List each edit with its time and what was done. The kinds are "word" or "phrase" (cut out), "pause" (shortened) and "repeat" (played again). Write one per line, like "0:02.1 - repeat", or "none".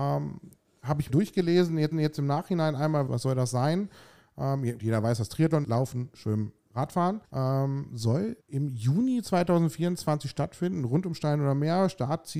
0:01.1 - word
0:01.9 - repeat
0:03.1 - phrase
0:04.8 - word
0:05.6 - word
0:07.2 - pause
0:08.4 - pause